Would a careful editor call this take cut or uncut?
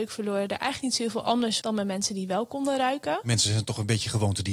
cut